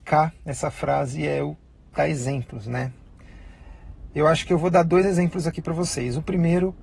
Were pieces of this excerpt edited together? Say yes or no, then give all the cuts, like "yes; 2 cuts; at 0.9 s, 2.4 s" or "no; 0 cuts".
no; 0 cuts